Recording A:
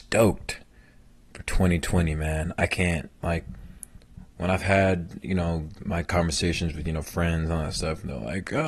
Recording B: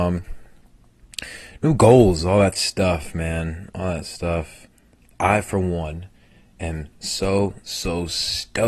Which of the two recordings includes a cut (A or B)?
A